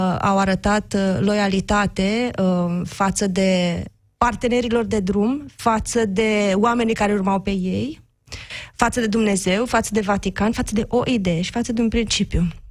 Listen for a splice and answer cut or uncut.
cut